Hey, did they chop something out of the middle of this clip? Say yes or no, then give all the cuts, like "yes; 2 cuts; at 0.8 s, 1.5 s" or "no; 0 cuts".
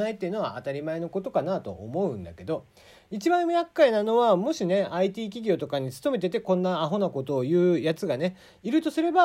no; 0 cuts